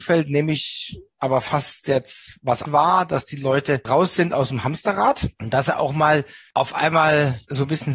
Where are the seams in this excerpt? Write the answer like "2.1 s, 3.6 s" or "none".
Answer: 2.6 s